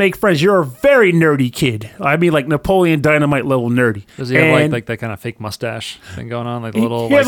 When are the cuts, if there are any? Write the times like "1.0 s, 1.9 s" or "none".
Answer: 4.1 s

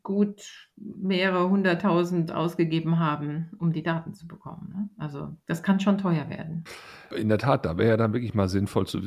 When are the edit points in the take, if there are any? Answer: none

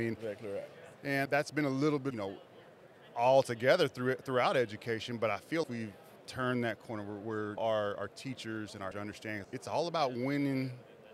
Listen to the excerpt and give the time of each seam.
1.3 s, 2.1 s, 5.6 s, 7.6 s, 8.9 s, 9.4 s

